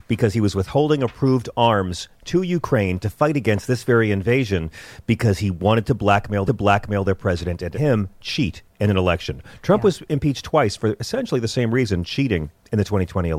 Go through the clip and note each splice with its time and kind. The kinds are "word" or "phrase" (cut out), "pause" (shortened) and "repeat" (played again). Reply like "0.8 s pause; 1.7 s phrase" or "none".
6.5 s repeat; 7.7 s word